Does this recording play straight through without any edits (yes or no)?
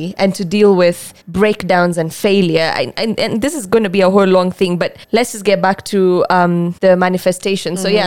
no